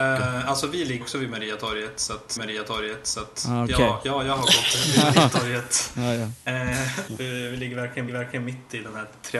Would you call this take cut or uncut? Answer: cut